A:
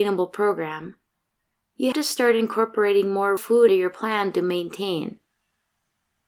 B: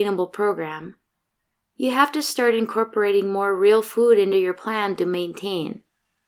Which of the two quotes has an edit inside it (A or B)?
A